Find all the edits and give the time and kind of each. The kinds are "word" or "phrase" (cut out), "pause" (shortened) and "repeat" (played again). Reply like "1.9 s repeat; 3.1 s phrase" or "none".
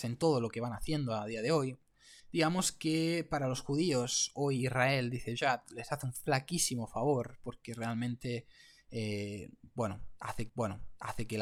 2.2 s pause; 10.5 s repeat

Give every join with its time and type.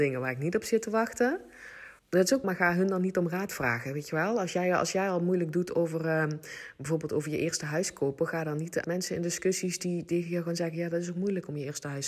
2.0 s pause; 2.4 s word; 8.8 s word

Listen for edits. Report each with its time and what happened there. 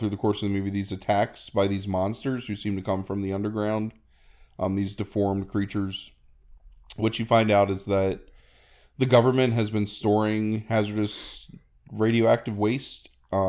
none

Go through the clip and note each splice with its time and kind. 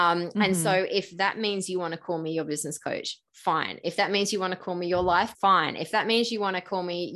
5.3 s word

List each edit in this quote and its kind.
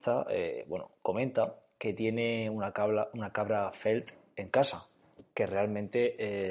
none

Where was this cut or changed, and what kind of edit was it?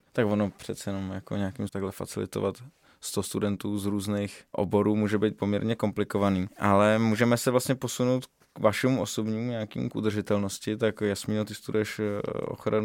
1.7 s word; 9.9 s word

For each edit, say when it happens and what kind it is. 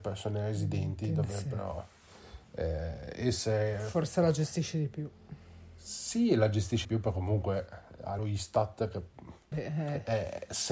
6.8 s word; 8.2 s word; 9.5 s word

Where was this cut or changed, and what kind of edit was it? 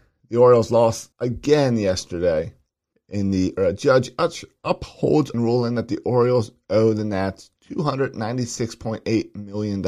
1.1 s pause; 2.9 s pause; 3.6 s phrase; 5.3 s word

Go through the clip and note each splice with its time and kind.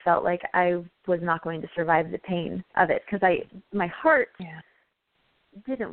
none

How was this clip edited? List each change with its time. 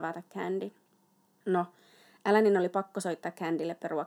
none

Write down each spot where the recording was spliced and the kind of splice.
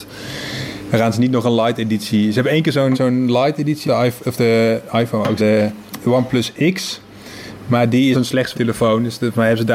2.9 s word; 3.8 s word; 5.4 s word; 8.1 s phrase; 8.5 s word

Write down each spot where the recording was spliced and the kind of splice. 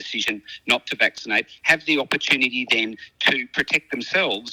none

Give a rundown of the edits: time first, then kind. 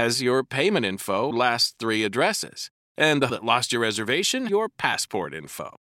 1.3 s word; 3.3 s word; 4.5 s word

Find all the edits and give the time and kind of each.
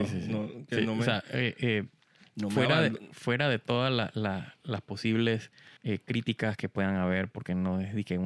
5.8 s pause

